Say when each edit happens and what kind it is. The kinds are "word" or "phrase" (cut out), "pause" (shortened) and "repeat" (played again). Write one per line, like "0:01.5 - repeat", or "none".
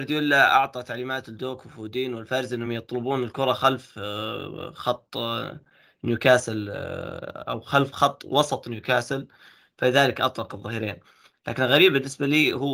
none